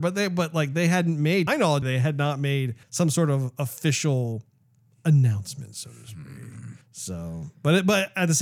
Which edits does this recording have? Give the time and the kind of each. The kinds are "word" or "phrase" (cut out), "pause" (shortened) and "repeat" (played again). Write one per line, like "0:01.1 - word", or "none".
0:01.5 - word
0:01.8 - word
0:02.8 - pause
0:06.8 - pause